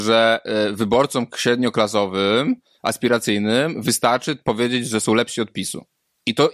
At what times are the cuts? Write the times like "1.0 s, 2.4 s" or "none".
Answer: none